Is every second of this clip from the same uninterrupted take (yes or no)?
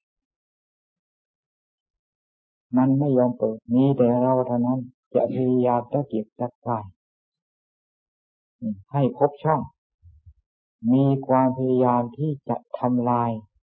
no